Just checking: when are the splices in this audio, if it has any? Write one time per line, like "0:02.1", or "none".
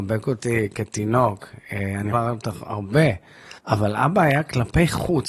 0:02.1
0:03.6

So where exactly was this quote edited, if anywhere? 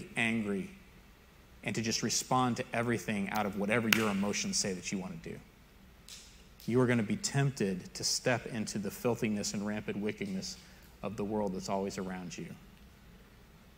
none

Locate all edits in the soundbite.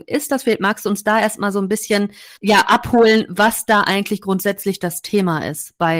0:02.4

